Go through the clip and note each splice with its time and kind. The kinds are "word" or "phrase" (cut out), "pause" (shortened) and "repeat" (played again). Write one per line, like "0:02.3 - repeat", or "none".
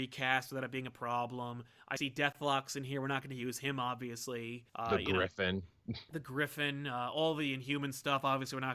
0:04.7 - pause